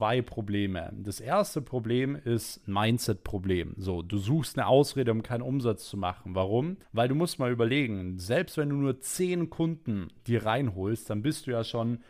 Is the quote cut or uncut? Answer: cut